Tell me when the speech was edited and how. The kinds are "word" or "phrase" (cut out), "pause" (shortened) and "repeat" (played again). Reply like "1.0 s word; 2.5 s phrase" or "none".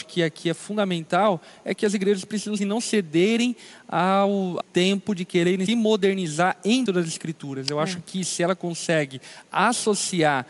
2.6 s phrase; 4.6 s phrase; 5.7 s word; 6.9 s word